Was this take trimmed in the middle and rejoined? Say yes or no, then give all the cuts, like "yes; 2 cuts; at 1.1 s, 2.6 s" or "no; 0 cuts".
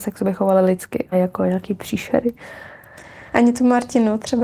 yes; 1 cut; at 1.1 s